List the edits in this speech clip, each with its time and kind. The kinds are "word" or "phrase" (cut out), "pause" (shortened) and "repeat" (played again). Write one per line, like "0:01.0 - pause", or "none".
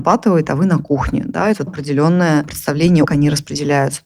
0:01.7 - word
0:03.0 - phrase